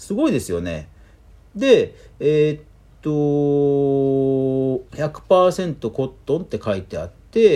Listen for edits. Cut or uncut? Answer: cut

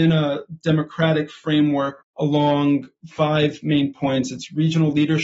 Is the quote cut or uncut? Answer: cut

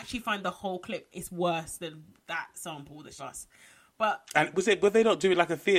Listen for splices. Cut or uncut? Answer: cut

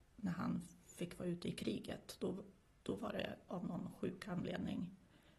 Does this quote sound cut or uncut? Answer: uncut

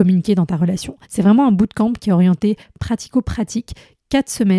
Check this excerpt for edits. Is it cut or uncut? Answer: cut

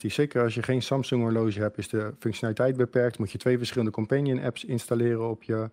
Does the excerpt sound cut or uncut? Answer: uncut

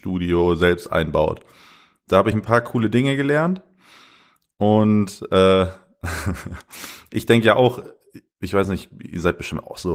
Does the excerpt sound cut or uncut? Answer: uncut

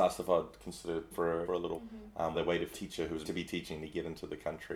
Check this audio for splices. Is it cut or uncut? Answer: cut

